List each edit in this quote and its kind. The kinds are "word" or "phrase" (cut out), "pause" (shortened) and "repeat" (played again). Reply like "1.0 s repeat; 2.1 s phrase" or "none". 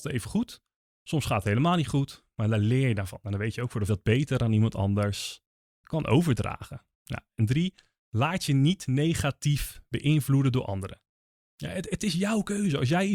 3.9 s phrase; 5.8 s word; 6.9 s pause